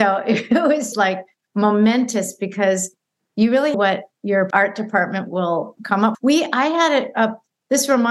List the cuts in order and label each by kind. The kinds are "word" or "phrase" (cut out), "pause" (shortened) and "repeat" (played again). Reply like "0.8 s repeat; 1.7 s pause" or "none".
0.9 s word; 3.7 s phrase; 4.5 s word; 5.8 s word; 6.1 s word